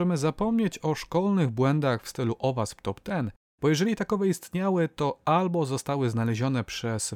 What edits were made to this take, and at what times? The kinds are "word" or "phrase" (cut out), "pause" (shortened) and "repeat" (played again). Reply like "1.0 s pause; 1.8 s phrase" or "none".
none